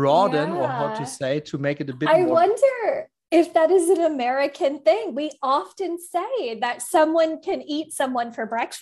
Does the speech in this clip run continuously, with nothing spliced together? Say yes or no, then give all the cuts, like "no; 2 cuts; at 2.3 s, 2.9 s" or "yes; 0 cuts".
yes; 0 cuts